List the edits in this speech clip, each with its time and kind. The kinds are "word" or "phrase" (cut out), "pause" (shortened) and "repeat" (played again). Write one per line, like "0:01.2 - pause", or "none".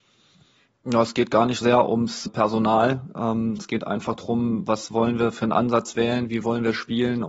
0:01.6 - word
0:02.3 - word
0:03.6 - word